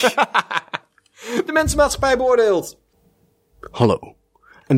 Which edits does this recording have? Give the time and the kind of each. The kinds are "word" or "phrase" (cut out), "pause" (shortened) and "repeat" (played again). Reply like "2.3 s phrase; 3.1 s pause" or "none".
none